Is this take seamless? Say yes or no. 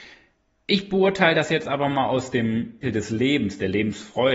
no